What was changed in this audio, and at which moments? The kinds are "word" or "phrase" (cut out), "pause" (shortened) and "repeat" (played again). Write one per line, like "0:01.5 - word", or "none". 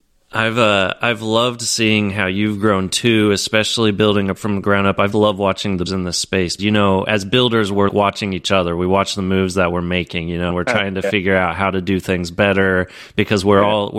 0:04.4 - word
0:05.1 - word
0:05.9 - word
0:06.6 - word
0:07.9 - word
0:10.5 - word